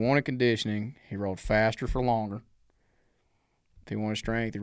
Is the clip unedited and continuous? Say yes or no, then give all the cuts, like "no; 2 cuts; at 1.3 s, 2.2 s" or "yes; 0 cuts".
yes; 0 cuts